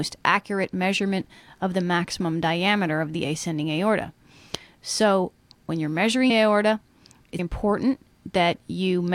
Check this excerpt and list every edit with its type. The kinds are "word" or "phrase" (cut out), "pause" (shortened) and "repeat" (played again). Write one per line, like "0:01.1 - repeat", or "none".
0:06.3 - word
0:07.4 - word